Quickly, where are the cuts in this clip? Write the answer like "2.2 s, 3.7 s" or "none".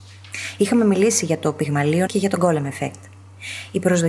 2.1 s